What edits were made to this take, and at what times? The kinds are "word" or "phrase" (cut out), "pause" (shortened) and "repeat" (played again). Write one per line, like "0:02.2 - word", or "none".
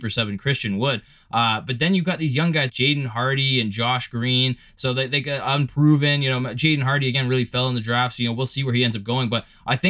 0:02.7 - word